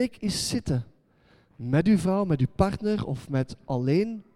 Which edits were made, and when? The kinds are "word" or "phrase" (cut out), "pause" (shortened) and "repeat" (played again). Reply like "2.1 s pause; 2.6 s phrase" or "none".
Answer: none